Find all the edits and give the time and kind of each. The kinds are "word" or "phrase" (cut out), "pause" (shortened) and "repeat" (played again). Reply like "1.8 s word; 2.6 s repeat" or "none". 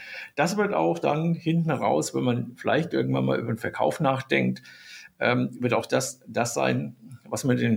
none